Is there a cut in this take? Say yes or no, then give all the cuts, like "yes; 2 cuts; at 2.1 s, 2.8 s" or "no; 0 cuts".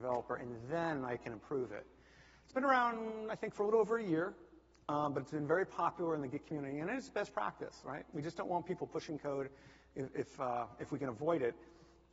no; 0 cuts